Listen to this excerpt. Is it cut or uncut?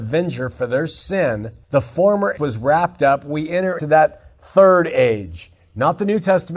cut